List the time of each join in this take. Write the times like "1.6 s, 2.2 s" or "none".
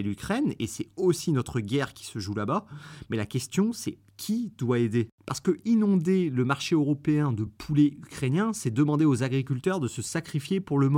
none